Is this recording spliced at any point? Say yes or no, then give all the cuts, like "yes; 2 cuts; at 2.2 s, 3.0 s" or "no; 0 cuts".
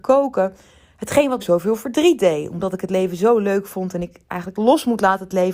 yes; 1 cut; at 1.4 s